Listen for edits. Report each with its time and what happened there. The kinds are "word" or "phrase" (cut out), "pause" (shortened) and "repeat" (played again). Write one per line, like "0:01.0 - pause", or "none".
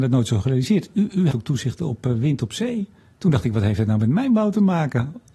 0:01.3 - word